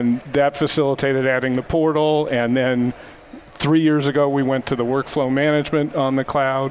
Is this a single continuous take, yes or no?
no